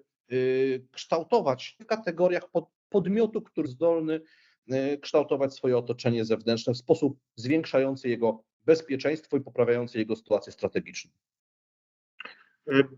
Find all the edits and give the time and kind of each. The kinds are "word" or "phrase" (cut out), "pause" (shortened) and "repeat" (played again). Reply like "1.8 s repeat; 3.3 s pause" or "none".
1.8 s phrase; 3.6 s word